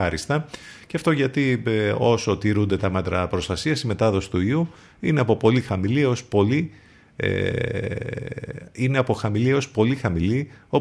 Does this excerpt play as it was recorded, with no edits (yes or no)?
yes